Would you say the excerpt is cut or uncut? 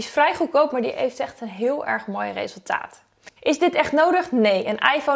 cut